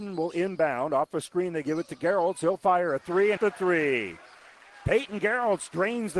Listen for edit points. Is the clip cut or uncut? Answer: cut